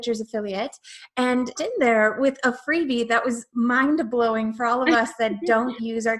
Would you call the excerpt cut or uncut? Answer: cut